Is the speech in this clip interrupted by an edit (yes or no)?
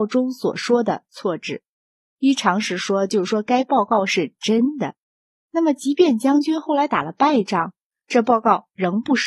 no